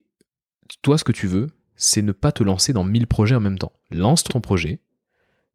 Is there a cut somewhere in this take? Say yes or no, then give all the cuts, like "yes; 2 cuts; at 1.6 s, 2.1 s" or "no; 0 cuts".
yes; 1 cut; at 4.3 s